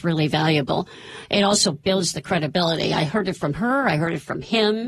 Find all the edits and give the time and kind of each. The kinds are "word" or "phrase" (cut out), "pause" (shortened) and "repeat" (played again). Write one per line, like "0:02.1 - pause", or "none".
none